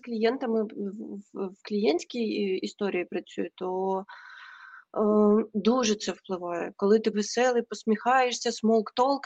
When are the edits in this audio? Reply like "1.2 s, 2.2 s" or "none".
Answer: 7.1 s